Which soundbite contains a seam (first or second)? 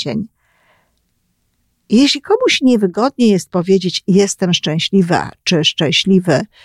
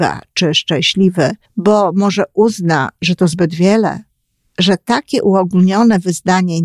second